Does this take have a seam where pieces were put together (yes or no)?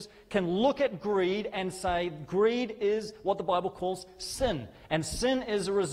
no